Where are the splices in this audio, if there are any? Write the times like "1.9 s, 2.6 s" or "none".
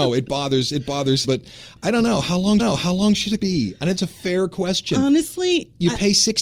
1.2 s, 2.6 s, 3.4 s, 4.0 s

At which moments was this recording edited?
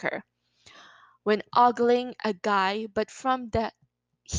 none

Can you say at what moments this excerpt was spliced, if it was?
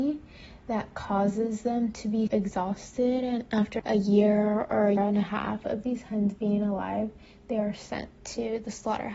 2.3 s, 3.8 s, 5.0 s

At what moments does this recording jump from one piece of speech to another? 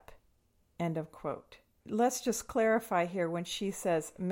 none

